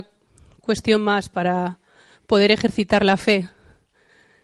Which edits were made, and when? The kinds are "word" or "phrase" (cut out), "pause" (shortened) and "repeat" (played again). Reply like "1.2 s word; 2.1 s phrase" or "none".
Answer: none